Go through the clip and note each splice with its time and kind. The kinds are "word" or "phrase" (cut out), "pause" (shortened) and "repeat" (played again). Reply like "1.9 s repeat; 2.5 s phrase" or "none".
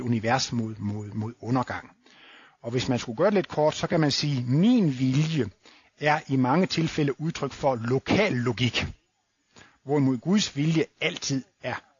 none